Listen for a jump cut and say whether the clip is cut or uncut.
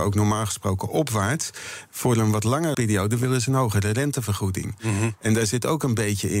cut